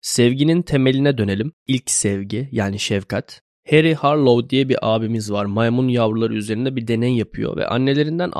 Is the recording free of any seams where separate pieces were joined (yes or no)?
yes